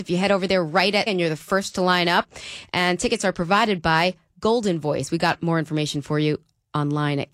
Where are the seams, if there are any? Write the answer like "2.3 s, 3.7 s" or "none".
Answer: 1.1 s

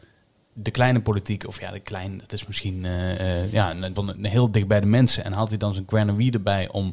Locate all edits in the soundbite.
4.0 s

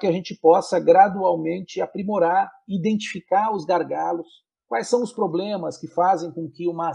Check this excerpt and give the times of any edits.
4.5 s

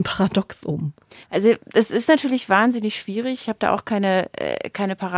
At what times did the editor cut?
1.2 s

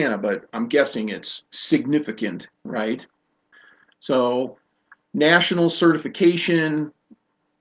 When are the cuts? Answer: 1.5 s, 3.5 s

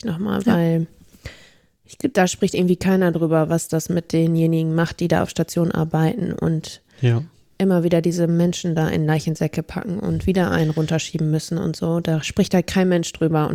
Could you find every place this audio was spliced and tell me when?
none

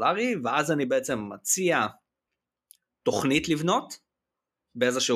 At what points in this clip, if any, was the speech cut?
none

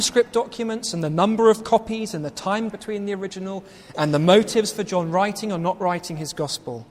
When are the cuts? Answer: 2.7 s

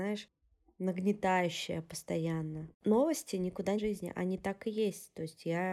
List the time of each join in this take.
2.7 s, 3.8 s

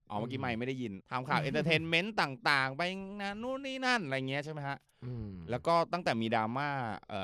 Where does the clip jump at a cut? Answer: 1.0 s

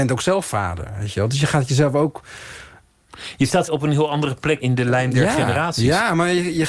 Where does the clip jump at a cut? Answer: 3.7 s, 4.6 s

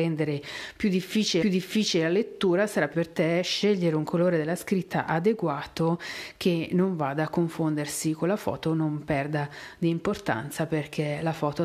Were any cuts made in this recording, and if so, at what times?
1.4 s, 2.9 s

